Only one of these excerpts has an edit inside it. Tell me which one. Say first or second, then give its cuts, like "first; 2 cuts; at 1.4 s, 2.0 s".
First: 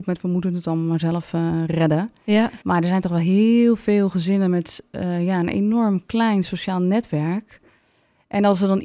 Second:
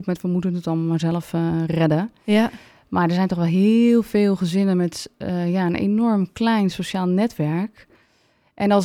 first; 1 cut; at 2.6 s